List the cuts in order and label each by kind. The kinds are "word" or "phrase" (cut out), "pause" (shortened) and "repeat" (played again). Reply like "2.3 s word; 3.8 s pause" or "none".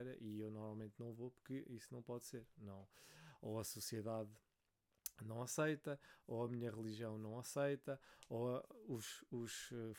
none